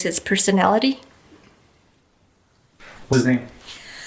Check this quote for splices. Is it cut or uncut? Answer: cut